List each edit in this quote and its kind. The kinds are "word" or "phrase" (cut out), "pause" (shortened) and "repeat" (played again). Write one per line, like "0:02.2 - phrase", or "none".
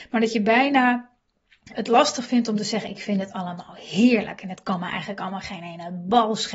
0:01.7 - word